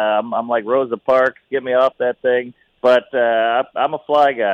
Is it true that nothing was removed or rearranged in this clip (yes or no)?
yes